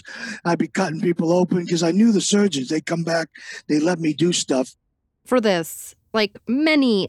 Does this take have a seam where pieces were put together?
no; 0 cuts

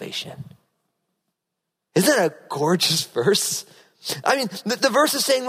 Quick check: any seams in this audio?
no; 0 cuts

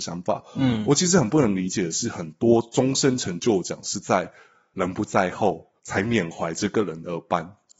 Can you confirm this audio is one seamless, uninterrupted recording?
no; 1 cut; at 5.8 s

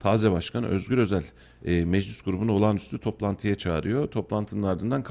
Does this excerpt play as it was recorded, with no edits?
yes; 0 cuts

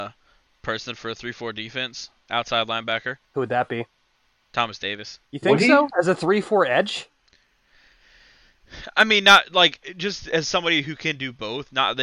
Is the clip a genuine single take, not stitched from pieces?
no; 3 cuts; at 3.2 s, 4.1 s, 5.3 s

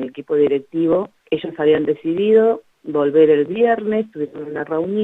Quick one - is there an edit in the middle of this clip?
yes; 2 cuts; at 1.2 s, 2.7 s

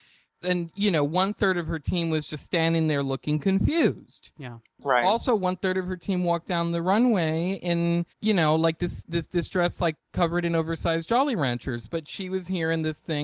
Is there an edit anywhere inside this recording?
yes; 1 cut; at 8.1 s

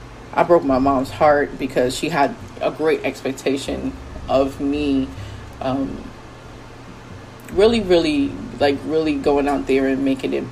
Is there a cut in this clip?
no; 0 cuts

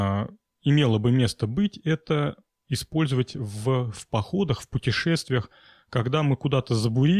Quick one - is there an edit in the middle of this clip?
no; 0 cuts

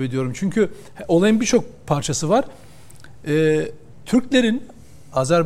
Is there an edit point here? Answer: yes; 1 cut; at 3.9 s

